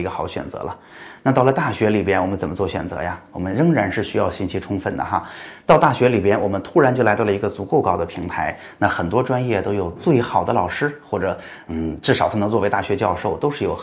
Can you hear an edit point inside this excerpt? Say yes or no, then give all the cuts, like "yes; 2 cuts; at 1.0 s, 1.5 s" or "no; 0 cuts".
no; 0 cuts